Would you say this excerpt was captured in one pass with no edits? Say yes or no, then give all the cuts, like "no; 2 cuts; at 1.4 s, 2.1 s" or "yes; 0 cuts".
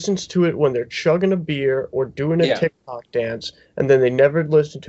yes; 0 cuts